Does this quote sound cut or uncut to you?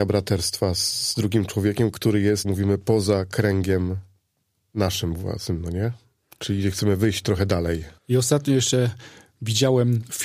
cut